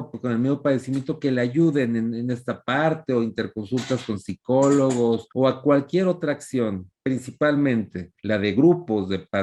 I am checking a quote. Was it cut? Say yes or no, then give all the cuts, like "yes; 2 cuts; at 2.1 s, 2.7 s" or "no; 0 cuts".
yes; 2 cuts; at 5.3 s, 8.2 s